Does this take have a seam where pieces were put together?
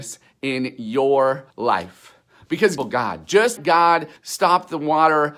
yes; 4 cuts; at 1.5 s, 2.8 s, 3.6 s, 4.2 s

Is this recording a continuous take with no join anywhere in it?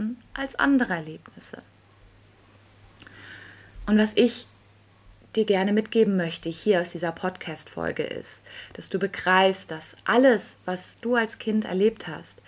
yes; 0 cuts

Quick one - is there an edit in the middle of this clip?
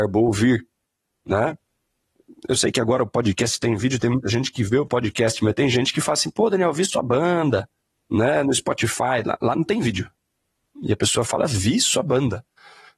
no; 0 cuts

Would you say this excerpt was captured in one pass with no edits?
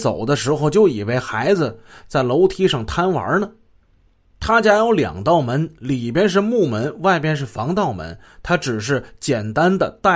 yes; 0 cuts

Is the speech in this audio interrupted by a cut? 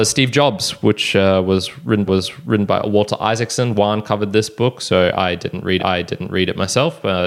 yes; 2 cuts; at 2.1 s, 5.8 s

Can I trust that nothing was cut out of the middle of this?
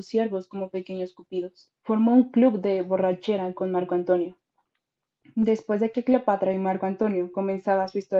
no; 1 cut; at 1.7 s

